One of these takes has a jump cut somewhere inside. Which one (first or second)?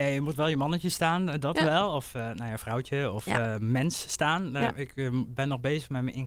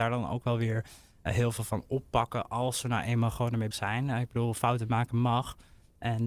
second